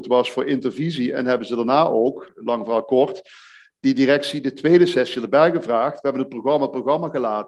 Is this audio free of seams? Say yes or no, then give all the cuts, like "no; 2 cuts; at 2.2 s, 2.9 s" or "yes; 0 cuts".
yes; 0 cuts